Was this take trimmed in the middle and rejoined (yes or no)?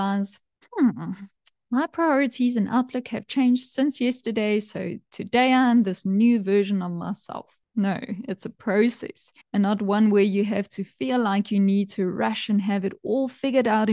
yes